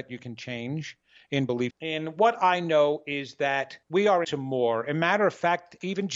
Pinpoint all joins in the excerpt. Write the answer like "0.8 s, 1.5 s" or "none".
1.7 s, 3.8 s, 4.2 s